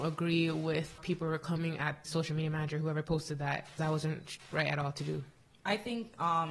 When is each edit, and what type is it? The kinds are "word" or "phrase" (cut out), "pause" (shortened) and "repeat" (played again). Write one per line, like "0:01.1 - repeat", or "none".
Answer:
0:01.0 - word
0:02.0 - word
0:03.8 - word
0:04.5 - word

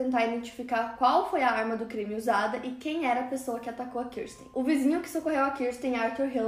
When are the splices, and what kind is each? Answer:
none

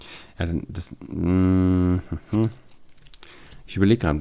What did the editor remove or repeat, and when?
none

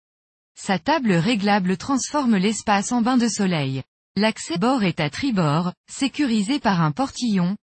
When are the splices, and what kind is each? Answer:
0:04.6 - word

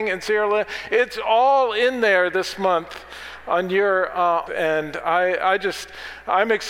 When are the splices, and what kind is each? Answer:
0:04.5 - phrase

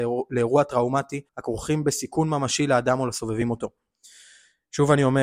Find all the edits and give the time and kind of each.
0:01.3 - pause

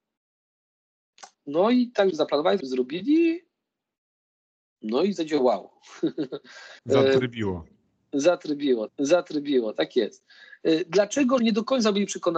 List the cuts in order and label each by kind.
0:01.3 - pause
0:02.1 - word
0:02.6 - word
0:06.8 - pause
0:08.9 - repeat
0:11.4 - word

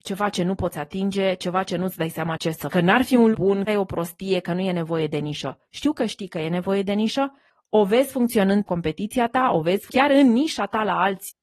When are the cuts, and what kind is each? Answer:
0:02.7 - word
0:03.3 - word
0:03.7 - word
0:08.6 - word
0:09.9 - word

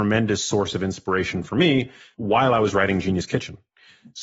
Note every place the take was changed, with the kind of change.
none

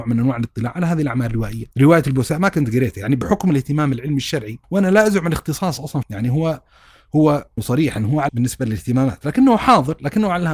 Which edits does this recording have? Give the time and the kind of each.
0:01.7 - pause
0:04.6 - pause
0:06.0 - phrase
0:07.6 - phrase
0:08.3 - word

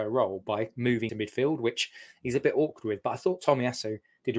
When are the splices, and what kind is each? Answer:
0:01.1 - word

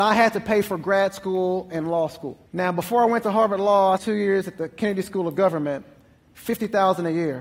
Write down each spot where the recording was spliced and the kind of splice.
0:02.5 - pause
0:04.0 - word

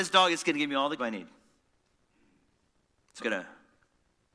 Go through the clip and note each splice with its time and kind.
0:01.0 - word
0:03.2 - word

